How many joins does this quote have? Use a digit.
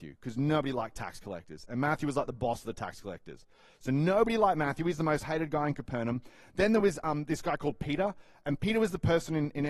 0